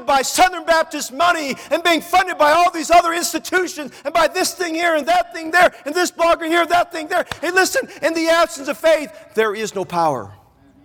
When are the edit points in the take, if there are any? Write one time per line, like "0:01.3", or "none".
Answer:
none